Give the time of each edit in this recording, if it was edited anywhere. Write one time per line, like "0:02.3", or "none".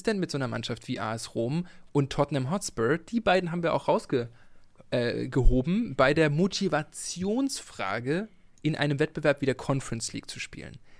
none